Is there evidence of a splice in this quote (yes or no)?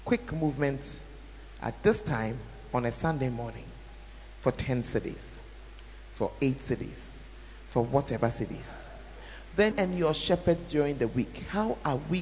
yes